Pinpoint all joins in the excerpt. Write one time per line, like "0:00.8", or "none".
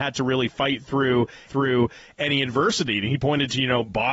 0:01.5

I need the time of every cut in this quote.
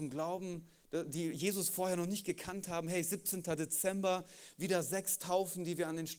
none

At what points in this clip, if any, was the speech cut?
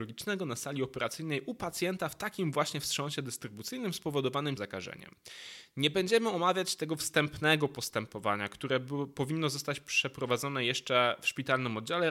0:04.6

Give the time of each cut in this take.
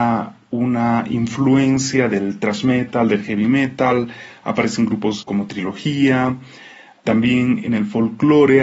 none

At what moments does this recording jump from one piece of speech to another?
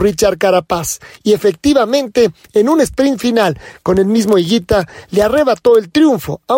none

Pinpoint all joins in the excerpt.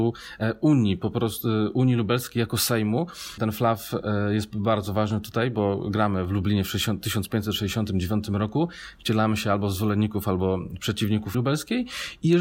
0:03.4
0:11.3

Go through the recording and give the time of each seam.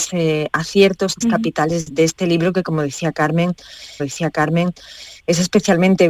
0:01.2
0:01.9
0:04.0

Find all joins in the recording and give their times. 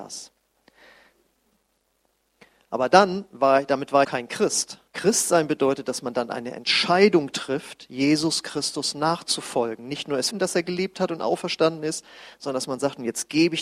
0:04.0
0:04.9
0:10.3

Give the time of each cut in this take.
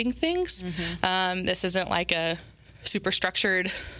0:02.6

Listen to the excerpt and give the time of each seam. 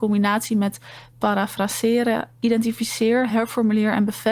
none

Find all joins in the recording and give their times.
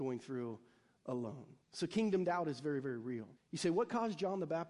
0:01.6
0:03.4

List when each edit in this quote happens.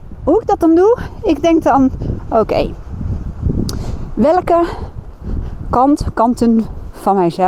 none

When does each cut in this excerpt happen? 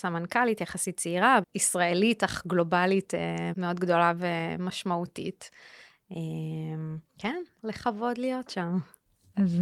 0:01.4
0:03.5
0:07.1
0:07.6

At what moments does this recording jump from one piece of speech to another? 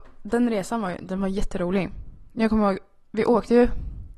none

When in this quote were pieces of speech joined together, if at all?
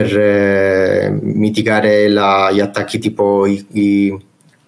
none

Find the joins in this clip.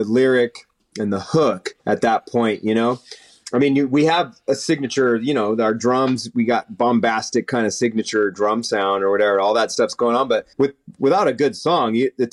0:01.8
0:03.4
0:10.5

